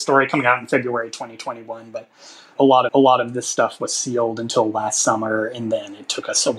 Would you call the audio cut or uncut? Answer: cut